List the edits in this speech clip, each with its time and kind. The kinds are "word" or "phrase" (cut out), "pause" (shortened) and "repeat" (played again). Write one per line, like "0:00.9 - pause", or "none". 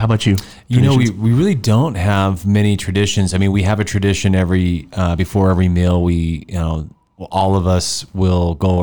none